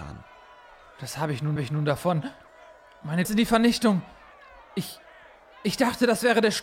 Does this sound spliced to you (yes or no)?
yes